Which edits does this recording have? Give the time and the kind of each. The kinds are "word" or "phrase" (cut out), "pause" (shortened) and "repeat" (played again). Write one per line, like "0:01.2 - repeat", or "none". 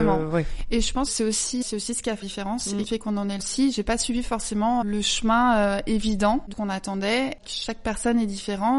0:01.1 - word
0:01.6 - word
0:02.2 - word
0:02.9 - word
0:03.4 - word
0:04.8 - word
0:06.5 - word